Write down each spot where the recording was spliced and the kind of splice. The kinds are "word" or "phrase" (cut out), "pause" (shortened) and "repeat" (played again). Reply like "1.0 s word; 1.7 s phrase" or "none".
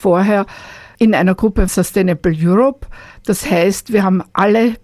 0.9 s word; 1.7 s word